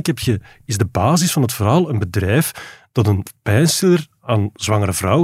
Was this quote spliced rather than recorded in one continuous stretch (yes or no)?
no